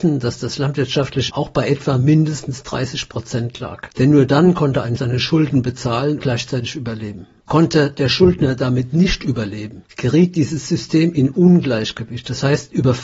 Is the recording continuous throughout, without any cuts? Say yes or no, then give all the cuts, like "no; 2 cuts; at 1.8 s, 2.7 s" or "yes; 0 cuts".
no; 3 cuts; at 1.3 s, 5.0 s, 6.2 s